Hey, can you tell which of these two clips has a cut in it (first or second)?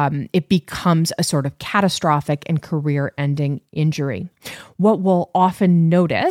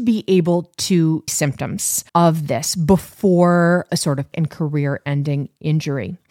second